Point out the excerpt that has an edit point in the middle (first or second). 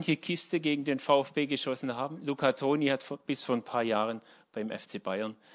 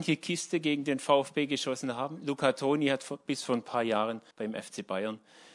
second